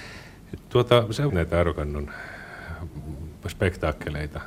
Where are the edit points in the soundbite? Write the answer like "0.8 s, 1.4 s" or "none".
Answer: 1.3 s

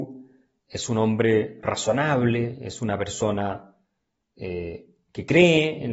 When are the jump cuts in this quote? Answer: none

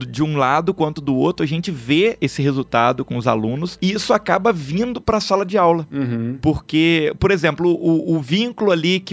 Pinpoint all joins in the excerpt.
none

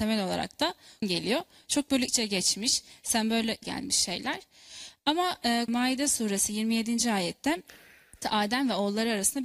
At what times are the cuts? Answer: 1.0 s, 2.1 s, 3.6 s, 5.7 s, 8.2 s

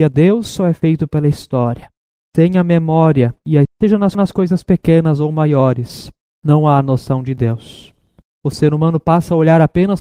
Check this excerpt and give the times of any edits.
3.6 s, 4.1 s

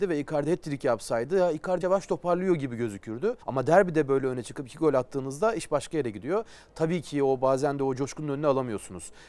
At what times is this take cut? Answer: 1.8 s, 3.4 s

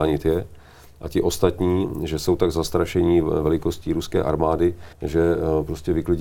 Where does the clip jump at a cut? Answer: 4.9 s

